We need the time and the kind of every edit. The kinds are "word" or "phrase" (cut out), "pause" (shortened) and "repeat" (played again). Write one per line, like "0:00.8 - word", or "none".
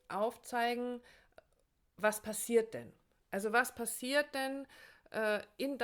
none

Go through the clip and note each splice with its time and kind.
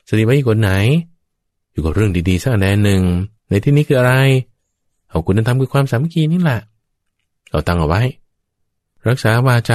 0:03.4 - pause

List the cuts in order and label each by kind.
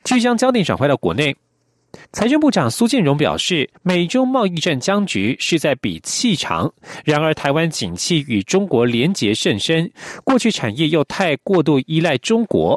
0:02.0 - pause
0:03.8 - pause

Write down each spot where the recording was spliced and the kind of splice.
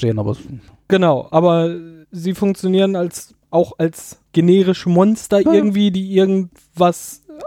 0:03.4 - pause
0:04.3 - pause

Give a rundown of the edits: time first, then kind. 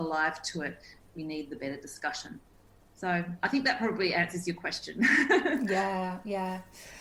none

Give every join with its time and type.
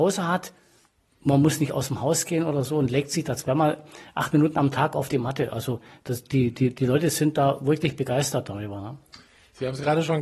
none

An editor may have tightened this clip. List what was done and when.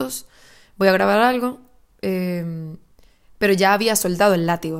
0:02.9 - pause

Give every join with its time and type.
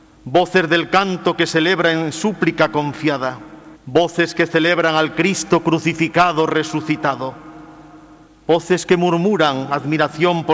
0:03.7 - pause
0:08.3 - pause

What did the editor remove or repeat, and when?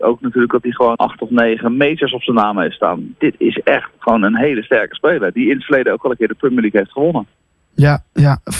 0:01.0 - word

